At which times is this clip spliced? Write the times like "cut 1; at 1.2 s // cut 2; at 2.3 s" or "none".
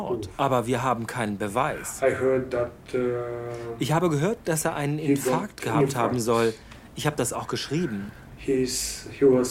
none